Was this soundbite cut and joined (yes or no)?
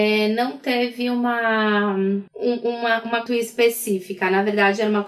yes